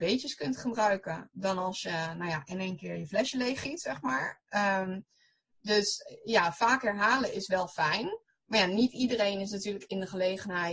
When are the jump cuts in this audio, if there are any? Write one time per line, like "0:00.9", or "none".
none